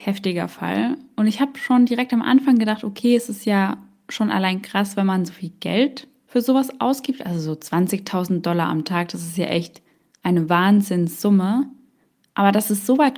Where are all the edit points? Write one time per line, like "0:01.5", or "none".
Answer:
none